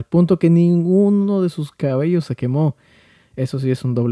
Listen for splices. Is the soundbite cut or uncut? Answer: uncut